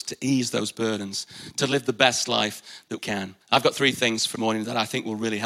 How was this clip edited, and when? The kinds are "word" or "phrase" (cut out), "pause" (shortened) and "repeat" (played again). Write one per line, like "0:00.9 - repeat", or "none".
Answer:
0:03.0 - word
0:03.4 - pause
0:04.4 - phrase